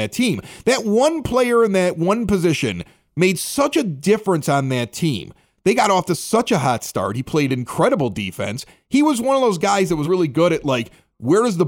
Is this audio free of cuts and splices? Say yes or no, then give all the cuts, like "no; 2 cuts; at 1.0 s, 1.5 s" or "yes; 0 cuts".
no; 1 cut; at 10.0 s